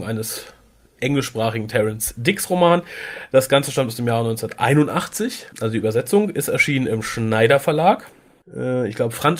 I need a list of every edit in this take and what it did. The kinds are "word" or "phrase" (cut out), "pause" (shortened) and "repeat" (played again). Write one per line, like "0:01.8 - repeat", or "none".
0:05.5 - pause